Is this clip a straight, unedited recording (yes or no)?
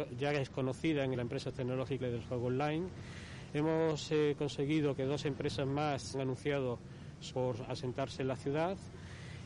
no